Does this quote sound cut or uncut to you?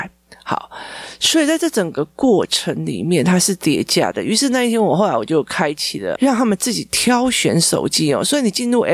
cut